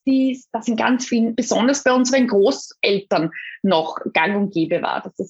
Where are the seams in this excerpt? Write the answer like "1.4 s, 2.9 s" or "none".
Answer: 1.3 s